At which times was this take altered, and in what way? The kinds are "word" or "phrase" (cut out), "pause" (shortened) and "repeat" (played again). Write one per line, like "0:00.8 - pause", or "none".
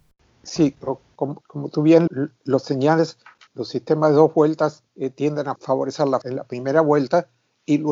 0:01.4 - word
0:02.1 - word
0:03.5 - word
0:04.9 - pause
0:05.6 - word
0:06.2 - word